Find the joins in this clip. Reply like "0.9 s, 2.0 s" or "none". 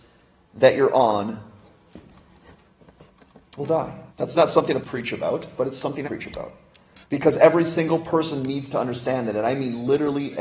3.6 s, 4.1 s, 4.8 s, 6.0 s, 7.0 s

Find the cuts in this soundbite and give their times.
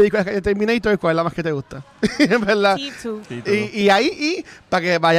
none

